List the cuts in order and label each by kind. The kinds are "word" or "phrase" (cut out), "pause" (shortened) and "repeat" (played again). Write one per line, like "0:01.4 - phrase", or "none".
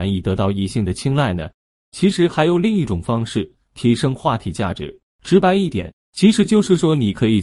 none